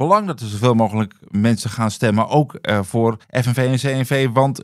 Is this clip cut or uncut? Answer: cut